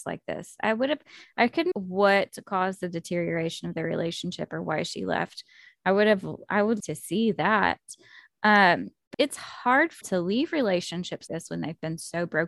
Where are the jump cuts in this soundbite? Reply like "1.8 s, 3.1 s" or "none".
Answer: 1.7 s, 6.8 s, 9.1 s, 10.0 s, 11.3 s